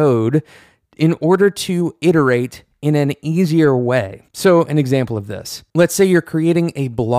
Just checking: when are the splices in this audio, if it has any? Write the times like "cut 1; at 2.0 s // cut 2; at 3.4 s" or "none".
cut 1; at 4.3 s